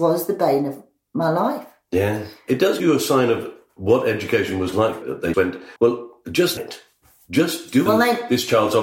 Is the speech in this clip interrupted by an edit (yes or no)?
yes